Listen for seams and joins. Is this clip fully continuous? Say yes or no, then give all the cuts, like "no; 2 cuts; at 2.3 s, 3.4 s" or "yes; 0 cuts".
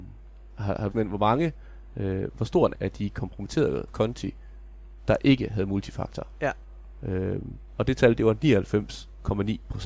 no; 3 cuts; at 0.9 s, 2.7 s, 3.9 s